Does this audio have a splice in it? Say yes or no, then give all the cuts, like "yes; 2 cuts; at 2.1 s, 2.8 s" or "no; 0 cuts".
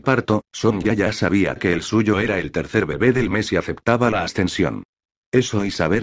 no; 0 cuts